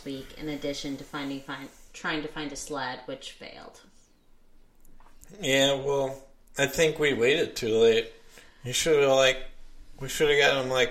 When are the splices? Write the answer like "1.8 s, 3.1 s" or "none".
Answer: none